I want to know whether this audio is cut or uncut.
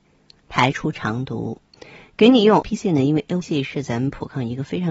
cut